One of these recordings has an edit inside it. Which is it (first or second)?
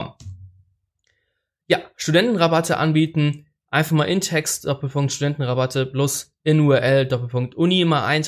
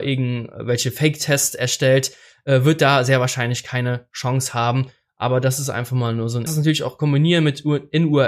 second